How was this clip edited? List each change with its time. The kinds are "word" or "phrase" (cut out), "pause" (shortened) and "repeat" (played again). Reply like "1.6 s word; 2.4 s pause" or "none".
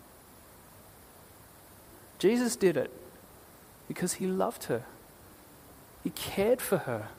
none